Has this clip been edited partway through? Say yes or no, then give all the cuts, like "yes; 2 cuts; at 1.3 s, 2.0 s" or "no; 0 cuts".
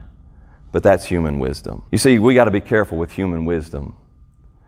yes; 1 cut; at 1.9 s